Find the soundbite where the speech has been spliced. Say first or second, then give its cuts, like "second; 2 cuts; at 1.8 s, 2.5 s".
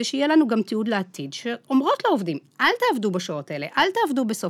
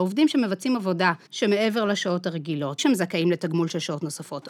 second; 2 cuts; at 1.3 s, 2.8 s